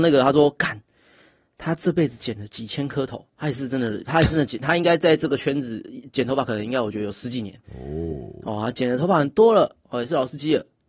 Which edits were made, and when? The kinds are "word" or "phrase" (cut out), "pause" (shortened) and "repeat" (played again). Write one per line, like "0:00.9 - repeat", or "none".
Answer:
0:07.6 - pause